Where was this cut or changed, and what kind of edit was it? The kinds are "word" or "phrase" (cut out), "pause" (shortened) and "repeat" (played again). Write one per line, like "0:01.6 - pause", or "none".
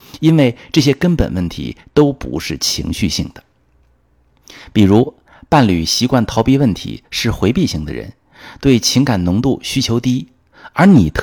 none